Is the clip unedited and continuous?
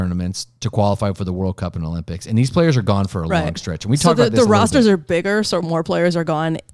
yes; 0 cuts

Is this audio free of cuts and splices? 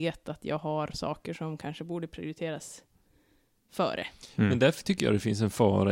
yes; 0 cuts

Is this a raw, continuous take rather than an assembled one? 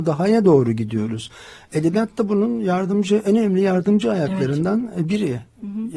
yes; 0 cuts

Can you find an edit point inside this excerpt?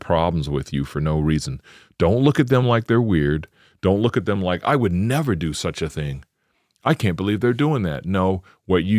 no; 0 cuts

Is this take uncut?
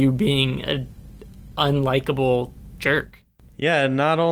yes; 0 cuts

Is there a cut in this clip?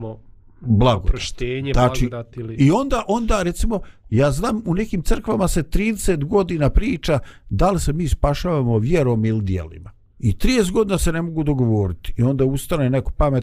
yes; 1 cut; at 10.1 s

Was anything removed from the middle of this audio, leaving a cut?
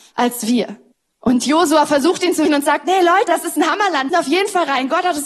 yes; 4 cuts; at 0.9 s, 2.5 s, 3.3 s, 4.1 s

